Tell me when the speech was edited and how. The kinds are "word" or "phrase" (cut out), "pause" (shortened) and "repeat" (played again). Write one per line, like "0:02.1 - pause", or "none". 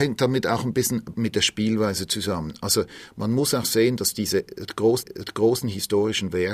0:05.0 - repeat